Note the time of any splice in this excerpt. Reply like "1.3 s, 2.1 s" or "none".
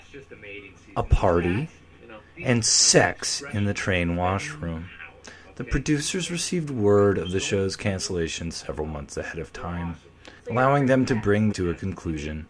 10.4 s, 11.5 s